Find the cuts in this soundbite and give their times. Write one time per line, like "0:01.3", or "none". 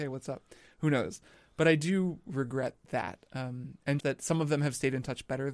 0:04.0